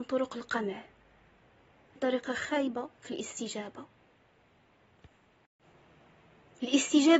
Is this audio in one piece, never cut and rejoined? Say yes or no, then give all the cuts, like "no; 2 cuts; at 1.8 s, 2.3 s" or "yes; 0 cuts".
no; 1 cut; at 2.0 s